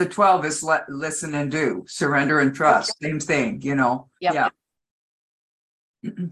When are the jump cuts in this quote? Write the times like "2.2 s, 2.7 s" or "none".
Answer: 4.2 s